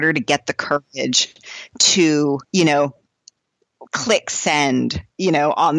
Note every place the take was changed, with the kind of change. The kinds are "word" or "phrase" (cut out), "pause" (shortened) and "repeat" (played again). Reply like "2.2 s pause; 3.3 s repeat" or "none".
2.4 s pause; 3.9 s pause

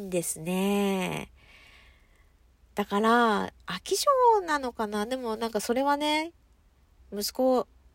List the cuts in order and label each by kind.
none

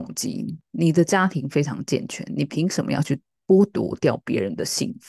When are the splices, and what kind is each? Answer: none

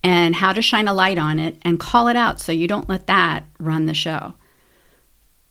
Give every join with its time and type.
none

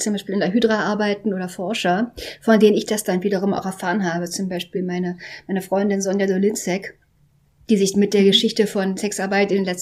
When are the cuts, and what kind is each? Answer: none

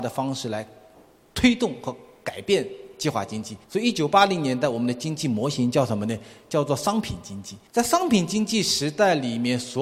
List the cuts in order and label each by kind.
3.6 s pause; 7.7 s pause

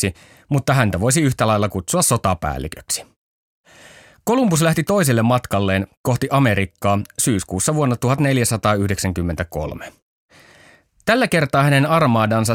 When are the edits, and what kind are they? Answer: none

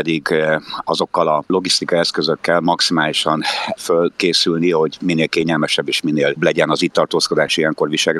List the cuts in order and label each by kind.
6.4 s word

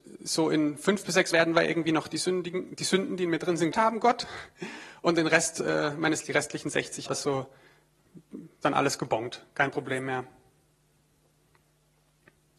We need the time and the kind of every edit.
1.3 s word; 3.7 s word; 6.2 s word; 7.1 s word; 8.6 s word

